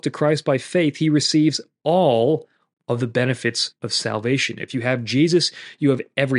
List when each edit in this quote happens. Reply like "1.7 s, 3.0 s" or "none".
none